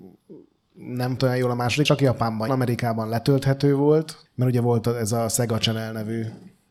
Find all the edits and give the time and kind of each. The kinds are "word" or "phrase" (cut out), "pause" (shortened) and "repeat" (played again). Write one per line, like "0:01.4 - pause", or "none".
0:01.2 - word
0:01.9 - phrase
0:02.5 - phrase
0:04.3 - pause

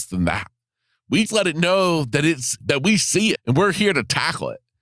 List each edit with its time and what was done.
0:01.3 - word
0:02.6 - word
0:03.4 - word

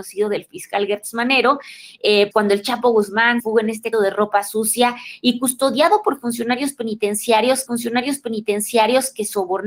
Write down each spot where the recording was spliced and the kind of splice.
0:02.3 - word
0:03.4 - word
0:03.9 - word
0:07.7 - repeat

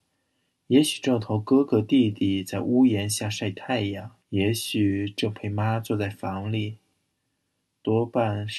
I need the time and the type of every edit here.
0:04.2 - pause

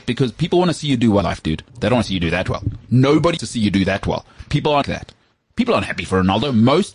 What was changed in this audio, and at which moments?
0:01.2 - word
0:01.7 - pause
0:03.4 - word
0:04.8 - word

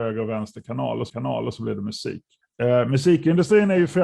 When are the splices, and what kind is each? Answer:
0:01.1 - repeat
0:02.4 - pause

